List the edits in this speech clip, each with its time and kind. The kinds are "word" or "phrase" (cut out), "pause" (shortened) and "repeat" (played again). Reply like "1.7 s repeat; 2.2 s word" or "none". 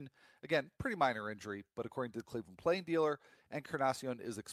none